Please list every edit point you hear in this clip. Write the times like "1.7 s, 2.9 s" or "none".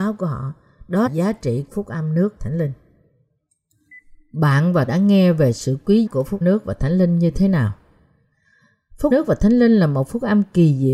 1.1 s, 1.7 s, 2.4 s, 4.9 s, 6.1 s, 6.4 s, 9.1 s